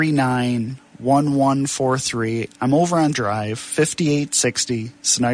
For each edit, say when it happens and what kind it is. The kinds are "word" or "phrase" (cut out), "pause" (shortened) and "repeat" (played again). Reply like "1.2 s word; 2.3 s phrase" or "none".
3.1 s word